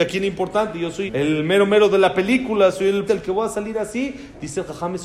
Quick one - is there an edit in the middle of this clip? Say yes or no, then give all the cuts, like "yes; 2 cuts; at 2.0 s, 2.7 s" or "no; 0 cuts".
yes; 2 cuts; at 1.1 s, 3.1 s